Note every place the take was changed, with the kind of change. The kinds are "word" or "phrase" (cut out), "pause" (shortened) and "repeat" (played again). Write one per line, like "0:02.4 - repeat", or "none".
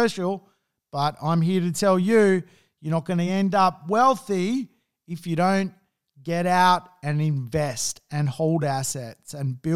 none